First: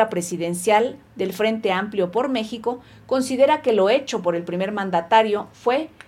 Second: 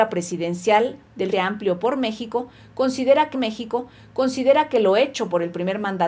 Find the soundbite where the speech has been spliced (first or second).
second